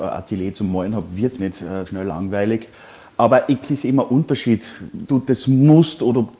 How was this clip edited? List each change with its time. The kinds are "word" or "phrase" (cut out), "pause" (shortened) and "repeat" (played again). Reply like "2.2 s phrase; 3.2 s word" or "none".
1.4 s word; 1.9 s word; 3.6 s word; 5.1 s word